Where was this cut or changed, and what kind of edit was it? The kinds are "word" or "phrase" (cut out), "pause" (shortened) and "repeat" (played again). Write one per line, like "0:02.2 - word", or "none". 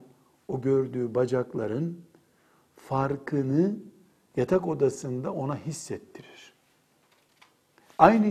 none